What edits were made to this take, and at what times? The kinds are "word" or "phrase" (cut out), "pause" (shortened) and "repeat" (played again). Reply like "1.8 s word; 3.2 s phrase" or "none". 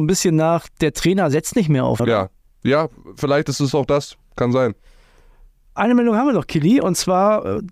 2.0 s word